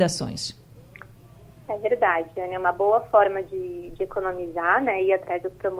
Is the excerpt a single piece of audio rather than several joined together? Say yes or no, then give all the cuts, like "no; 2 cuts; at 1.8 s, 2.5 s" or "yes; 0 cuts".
yes; 0 cuts